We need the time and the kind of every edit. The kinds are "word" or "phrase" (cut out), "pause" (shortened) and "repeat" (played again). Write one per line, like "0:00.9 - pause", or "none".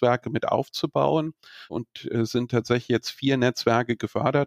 none